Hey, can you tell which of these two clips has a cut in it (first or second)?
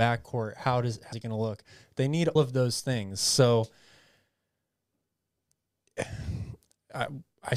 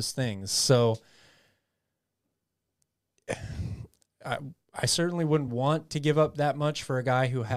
first